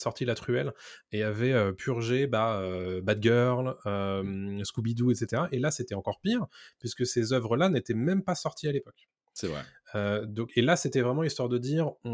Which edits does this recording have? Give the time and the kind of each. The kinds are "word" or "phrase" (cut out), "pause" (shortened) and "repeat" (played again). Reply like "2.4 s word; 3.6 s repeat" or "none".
none